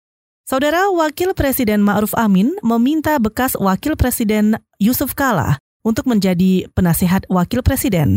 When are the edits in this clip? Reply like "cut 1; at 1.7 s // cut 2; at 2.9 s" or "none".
none